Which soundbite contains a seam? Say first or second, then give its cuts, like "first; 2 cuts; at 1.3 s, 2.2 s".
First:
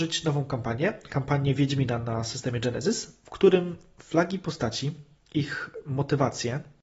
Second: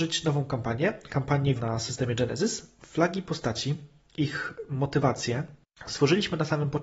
second; 2 cuts; at 1.6 s, 2.8 s